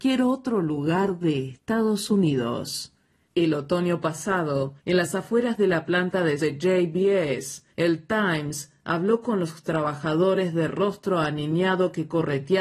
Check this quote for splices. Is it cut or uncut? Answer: cut